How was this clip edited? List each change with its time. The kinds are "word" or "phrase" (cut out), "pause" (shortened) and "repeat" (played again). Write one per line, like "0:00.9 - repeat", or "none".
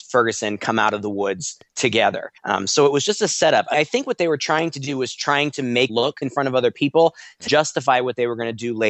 0:02.4 - pause
0:03.7 - word
0:05.9 - word
0:06.2 - word
0:07.5 - word